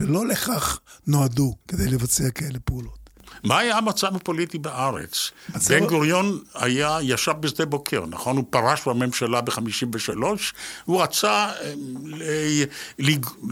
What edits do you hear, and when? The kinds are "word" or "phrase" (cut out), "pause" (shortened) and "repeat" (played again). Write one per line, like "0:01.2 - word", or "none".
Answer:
0:01.6 - pause

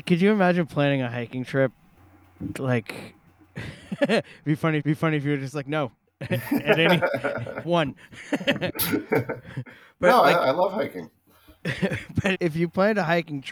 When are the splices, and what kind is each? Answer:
0:02.5 - word
0:04.8 - repeat
0:05.9 - pause
0:07.6 - word
0:12.3 - word

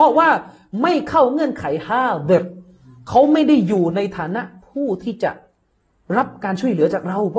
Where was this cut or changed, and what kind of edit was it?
none

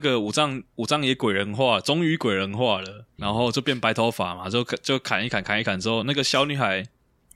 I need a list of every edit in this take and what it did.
0:03.2 - word

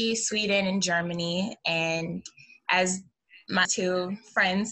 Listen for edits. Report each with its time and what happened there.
0:03.6 - word

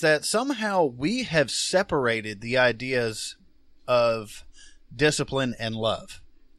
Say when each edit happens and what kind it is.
none

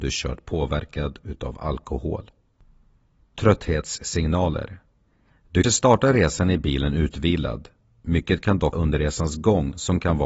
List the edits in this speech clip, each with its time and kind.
0:05.6 - word
0:08.7 - word

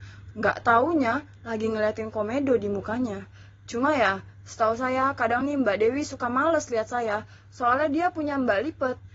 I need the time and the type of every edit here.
none

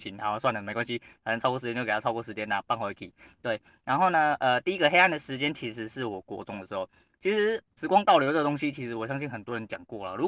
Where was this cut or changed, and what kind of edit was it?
0:07.8 - word

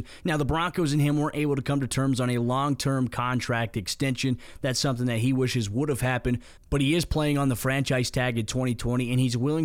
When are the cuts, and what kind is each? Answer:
none

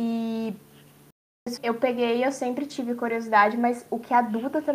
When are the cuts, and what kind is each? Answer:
0:01.6 - word

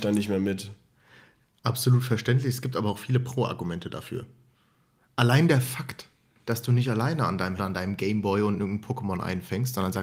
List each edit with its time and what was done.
0:07.6 - phrase

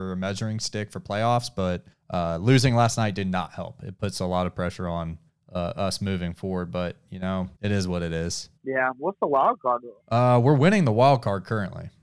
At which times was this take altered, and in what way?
0:01.9 - pause
0:05.3 - pause
0:07.6 - pause
0:08.6 - pause
0:10.0 - pause

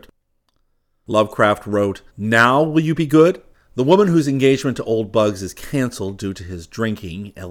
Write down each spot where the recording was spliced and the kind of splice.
0:02.1 - pause
0:03.5 - pause

